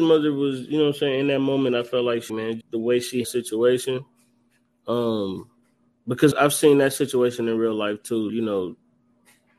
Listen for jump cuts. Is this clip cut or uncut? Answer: cut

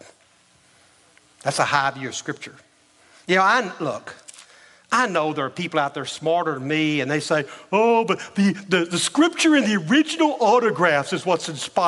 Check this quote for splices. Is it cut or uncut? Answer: uncut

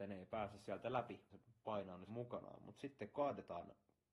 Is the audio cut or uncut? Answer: cut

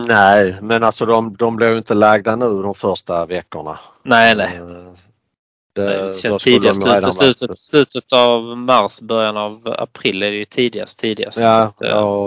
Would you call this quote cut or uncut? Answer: uncut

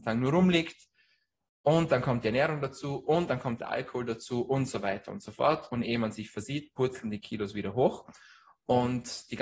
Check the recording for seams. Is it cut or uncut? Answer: uncut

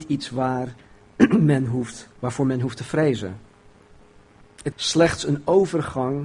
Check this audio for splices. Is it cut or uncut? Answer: cut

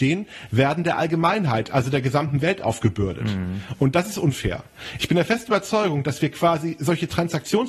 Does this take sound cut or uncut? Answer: uncut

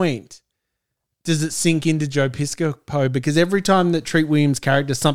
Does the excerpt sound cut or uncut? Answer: uncut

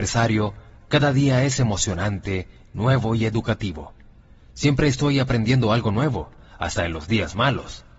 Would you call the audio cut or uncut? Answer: uncut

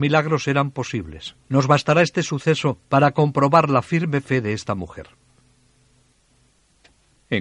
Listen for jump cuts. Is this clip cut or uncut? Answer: cut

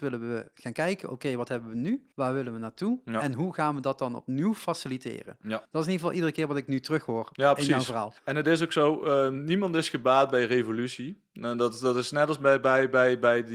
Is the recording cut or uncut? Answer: cut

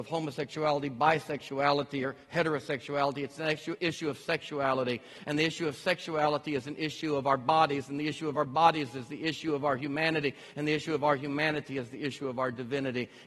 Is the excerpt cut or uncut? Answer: uncut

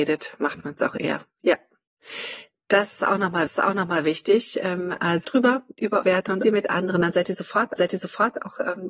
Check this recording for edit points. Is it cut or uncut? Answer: cut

